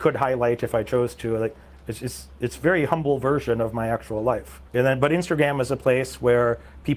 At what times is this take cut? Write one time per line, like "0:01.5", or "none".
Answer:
0:04.7